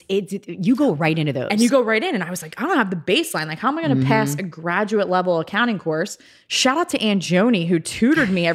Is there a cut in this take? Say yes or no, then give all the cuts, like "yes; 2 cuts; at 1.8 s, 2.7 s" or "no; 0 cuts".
no; 0 cuts